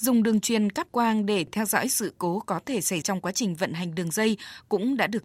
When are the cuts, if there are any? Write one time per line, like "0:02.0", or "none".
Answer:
0:03.0